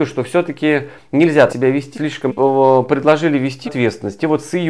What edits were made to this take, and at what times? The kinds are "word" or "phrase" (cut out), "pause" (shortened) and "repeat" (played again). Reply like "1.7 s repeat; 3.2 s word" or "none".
1.5 s word; 1.9 s word; 2.3 s phrase; 3.7 s word